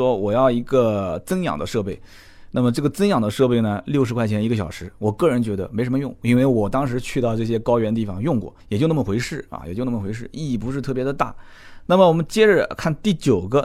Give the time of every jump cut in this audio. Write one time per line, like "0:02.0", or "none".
0:08.6

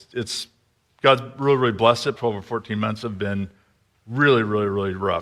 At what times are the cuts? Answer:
0:02.2

